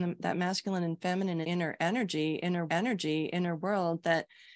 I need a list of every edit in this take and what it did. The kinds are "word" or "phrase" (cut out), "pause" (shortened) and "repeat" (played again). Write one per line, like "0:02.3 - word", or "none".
0:01.4 - word
0:02.7 - repeat